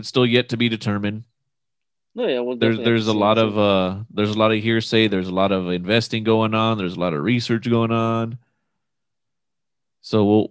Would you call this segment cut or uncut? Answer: uncut